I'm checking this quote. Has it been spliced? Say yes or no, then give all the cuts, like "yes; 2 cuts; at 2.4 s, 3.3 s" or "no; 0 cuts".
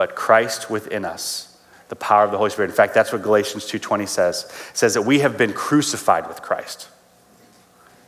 no; 0 cuts